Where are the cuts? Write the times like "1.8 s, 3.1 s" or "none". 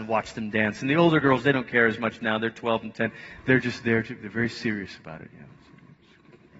none